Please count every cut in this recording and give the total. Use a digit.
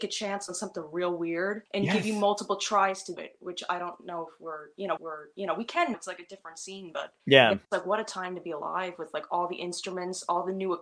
6